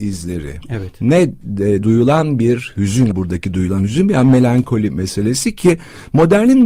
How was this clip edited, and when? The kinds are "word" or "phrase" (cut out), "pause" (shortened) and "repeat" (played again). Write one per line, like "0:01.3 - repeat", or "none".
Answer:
0:01.8 - word
0:03.1 - word